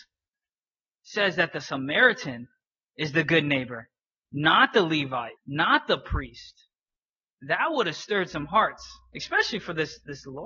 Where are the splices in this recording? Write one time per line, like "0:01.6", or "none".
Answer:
0:04.1
0:05.4